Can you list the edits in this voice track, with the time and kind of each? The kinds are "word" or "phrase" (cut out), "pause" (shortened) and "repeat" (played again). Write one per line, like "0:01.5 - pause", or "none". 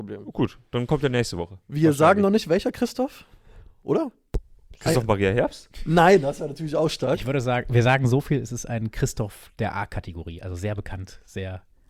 none